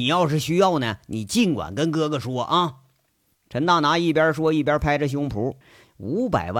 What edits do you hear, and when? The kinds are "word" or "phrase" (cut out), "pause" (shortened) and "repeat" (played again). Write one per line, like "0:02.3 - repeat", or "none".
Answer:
0:05.6 - pause